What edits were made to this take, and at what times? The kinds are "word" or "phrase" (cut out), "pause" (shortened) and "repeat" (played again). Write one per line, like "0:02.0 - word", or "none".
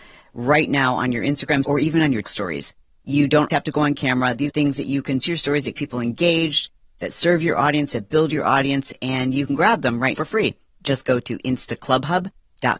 0:01.6 - word
0:02.2 - word
0:03.5 - word
0:04.5 - word
0:05.2 - word
0:05.7 - word
0:10.1 - word